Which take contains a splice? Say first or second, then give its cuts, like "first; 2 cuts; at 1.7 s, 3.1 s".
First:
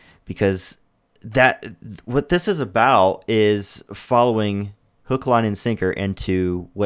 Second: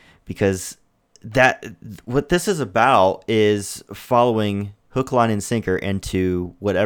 second; 1 cut; at 4.8 s